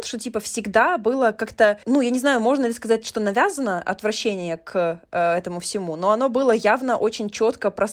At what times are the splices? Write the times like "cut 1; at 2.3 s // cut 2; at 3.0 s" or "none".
cut 1; at 1.8 s